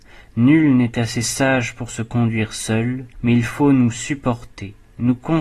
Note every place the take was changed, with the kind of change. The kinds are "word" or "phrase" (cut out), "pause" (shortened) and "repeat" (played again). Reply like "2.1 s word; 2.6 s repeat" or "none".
3.1 s pause

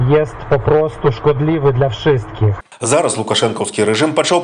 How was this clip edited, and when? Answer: none

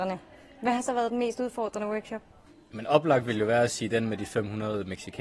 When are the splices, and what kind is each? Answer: none

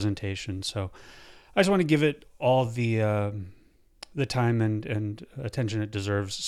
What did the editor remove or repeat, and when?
none

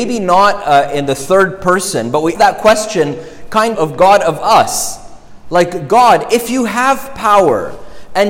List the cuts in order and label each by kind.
2.4 s word; 3.7 s word

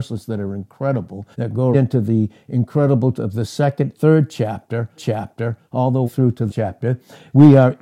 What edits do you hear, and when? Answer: 1.3 s pause; 1.7 s word; 3.1 s word; 3.9 s word; 5.0 s repeat; 6.1 s word; 6.5 s phrase

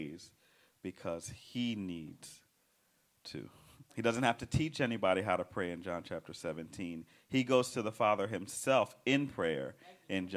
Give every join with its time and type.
3.9 s pause

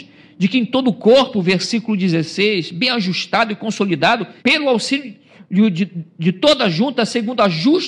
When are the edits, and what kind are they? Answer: 4.4 s pause

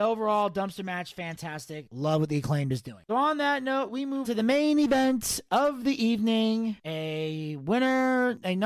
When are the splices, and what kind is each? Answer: 4.2 s word

